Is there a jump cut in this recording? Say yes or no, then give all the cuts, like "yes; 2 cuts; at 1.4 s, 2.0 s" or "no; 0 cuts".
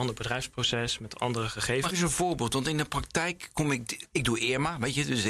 yes; 2 cuts; at 1.9 s, 4.1 s